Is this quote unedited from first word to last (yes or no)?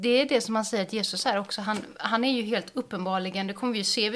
yes